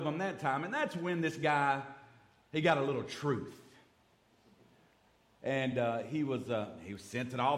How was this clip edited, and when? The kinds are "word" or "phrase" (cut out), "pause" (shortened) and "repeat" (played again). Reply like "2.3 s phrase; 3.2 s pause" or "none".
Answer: none